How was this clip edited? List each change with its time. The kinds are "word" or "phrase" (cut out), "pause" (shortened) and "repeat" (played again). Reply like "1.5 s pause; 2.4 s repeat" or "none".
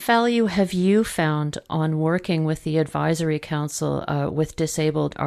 none

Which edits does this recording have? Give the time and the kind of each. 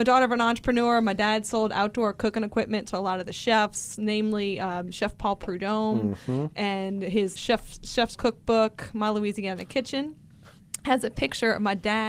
7.4 s word; 8.1 s word

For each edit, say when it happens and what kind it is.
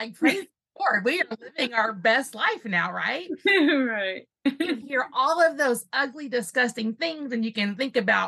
none

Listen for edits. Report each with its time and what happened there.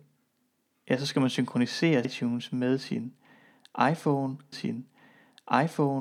2.0 s word; 4.5 s repeat

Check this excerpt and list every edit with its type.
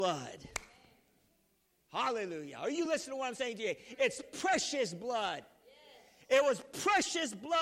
none

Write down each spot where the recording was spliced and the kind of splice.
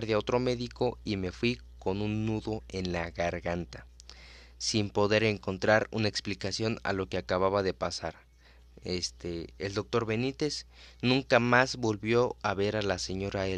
none

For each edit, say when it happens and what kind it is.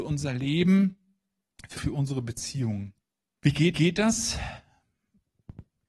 1.8 s phrase; 3.0 s pause; 3.7 s repeat

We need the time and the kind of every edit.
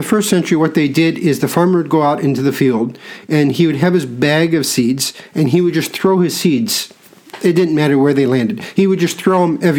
none

